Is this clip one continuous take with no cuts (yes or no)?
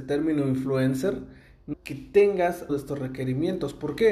no